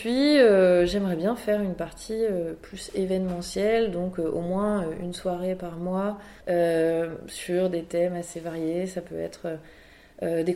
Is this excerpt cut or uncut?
cut